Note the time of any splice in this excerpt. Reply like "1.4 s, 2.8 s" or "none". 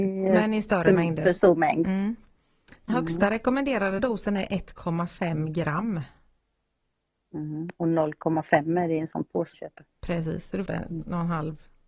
2.9 s, 4.0 s, 9.5 s, 9.9 s, 10.7 s